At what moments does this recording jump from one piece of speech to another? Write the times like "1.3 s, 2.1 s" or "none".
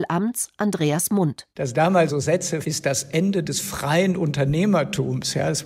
1.5 s, 2.1 s, 2.6 s